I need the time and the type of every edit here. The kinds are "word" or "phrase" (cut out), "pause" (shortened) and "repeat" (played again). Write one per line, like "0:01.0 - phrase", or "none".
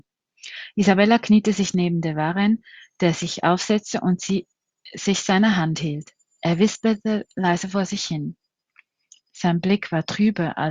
none